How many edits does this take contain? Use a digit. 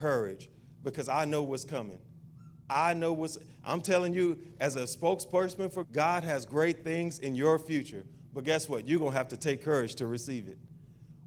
1